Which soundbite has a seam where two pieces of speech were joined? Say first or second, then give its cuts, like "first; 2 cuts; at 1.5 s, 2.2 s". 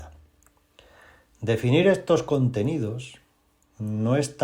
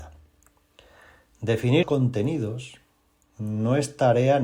second; 1 cut; at 1.8 s